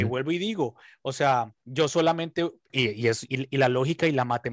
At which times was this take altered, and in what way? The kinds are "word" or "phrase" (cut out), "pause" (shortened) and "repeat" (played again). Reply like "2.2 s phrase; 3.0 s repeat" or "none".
1.6 s pause; 2.7 s word; 3.3 s word